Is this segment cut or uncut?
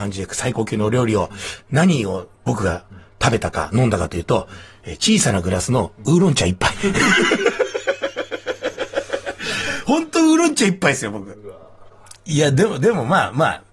cut